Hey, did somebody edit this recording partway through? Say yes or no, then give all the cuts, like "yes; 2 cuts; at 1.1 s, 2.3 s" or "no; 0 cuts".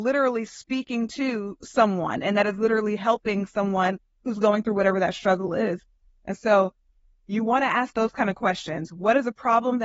no; 0 cuts